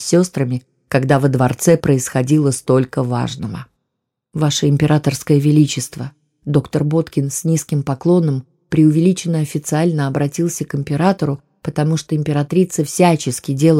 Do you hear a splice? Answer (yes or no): no